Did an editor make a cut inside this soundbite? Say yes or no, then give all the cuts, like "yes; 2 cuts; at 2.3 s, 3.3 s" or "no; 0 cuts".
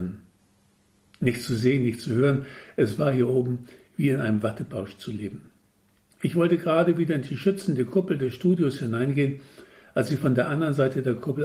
no; 0 cuts